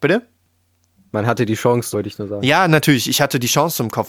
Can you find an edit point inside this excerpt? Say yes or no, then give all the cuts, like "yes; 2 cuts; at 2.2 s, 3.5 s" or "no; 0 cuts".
yes; 1 cut; at 1.9 s